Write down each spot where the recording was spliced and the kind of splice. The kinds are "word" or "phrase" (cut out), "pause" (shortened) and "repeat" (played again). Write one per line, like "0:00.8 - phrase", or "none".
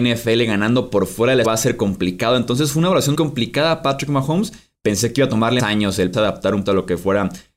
0:01.4 - word
0:03.1 - word
0:05.6 - word
0:06.1 - word
0:06.7 - word